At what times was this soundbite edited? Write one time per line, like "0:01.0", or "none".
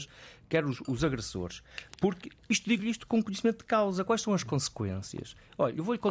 none